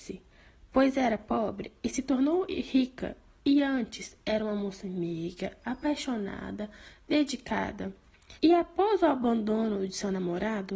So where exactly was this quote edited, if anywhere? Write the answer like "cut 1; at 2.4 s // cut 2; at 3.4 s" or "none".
cut 1; at 8.4 s